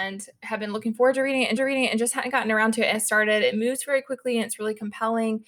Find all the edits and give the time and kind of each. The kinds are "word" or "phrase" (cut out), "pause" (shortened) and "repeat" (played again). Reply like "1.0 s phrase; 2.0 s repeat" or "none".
1.6 s repeat; 2.9 s phrase